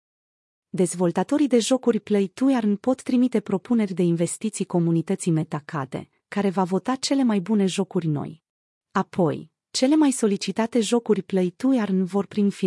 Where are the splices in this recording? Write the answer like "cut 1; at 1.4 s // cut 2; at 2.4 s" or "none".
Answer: cut 1; at 8.6 s